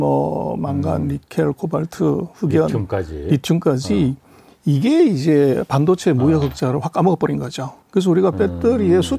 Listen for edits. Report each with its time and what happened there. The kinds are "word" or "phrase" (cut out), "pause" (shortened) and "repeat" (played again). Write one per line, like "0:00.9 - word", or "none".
0:07.8 - pause